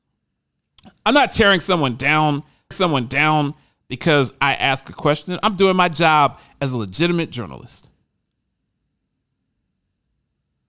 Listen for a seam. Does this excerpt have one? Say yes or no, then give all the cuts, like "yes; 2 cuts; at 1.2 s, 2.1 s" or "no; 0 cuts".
yes; 1 cut; at 2.7 s